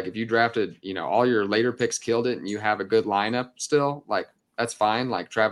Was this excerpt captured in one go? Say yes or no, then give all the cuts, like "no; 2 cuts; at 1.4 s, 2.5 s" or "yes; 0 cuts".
yes; 0 cuts